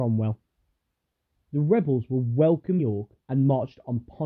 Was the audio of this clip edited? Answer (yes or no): yes